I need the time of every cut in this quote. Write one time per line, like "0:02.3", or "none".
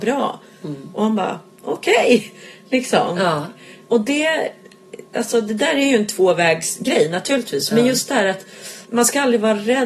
0:05.1
0:08.9